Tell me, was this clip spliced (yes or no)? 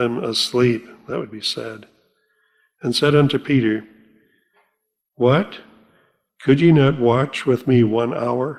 no